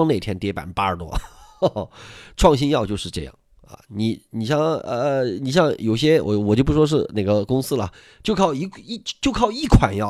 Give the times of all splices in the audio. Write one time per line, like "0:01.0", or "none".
none